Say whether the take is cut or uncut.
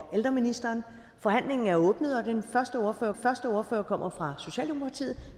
cut